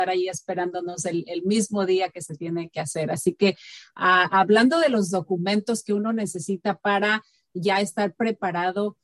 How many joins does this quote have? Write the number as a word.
zero